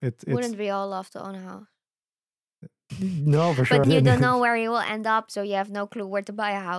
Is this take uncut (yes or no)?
no